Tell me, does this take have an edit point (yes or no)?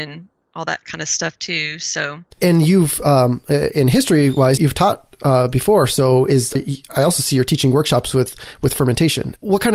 yes